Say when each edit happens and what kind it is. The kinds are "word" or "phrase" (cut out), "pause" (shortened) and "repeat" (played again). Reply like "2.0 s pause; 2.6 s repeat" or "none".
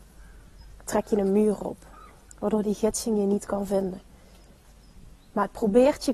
none